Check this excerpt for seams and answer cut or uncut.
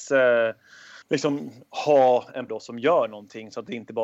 cut